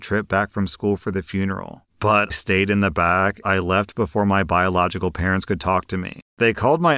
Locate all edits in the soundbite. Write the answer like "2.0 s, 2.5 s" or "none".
2.3 s, 3.4 s